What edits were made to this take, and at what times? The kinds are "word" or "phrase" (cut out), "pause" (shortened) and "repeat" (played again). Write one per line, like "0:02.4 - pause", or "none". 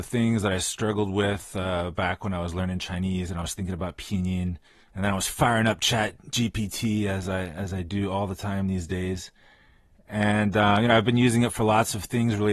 none